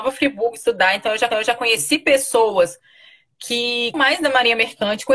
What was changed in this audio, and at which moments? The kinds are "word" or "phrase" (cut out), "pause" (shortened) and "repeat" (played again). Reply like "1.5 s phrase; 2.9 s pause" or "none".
1.3 s repeat; 3.9 s word